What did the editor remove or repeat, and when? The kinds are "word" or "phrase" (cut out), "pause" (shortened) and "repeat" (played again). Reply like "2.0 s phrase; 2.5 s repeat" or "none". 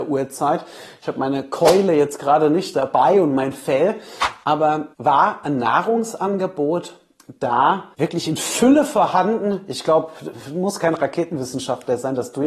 4.9 s pause; 7.9 s pause